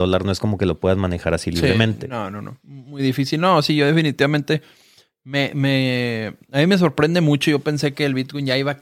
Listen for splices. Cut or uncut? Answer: uncut